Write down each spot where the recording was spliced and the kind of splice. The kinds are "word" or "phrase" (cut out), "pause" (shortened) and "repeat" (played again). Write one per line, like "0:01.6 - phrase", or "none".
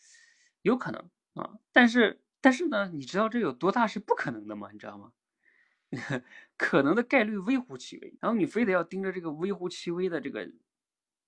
0:02.3 - pause
0:08.2 - pause